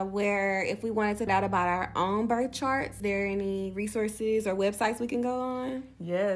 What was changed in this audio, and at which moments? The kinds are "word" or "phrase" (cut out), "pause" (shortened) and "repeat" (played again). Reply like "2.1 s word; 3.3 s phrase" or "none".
1.3 s word; 3.0 s word